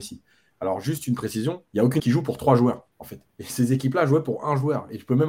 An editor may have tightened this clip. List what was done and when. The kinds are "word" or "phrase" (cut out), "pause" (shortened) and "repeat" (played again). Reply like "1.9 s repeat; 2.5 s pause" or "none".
1.7 s pause; 2.0 s word; 2.9 s pause; 3.3 s pause